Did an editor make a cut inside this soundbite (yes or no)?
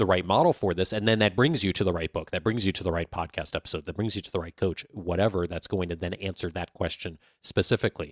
no